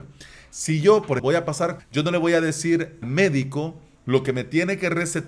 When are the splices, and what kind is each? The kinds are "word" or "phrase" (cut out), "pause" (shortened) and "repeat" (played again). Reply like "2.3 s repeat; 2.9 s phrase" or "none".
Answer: 1.2 s word; 1.8 s word; 3.0 s word